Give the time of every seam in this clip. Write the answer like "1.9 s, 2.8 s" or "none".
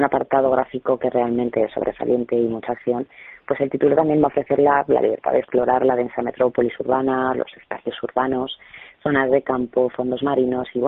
none